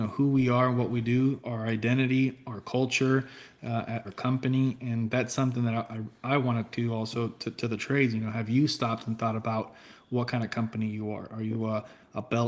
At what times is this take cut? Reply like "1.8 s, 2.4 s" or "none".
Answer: 4.0 s, 6.7 s